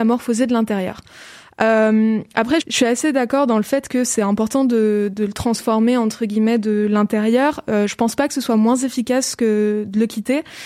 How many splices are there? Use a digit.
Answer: 2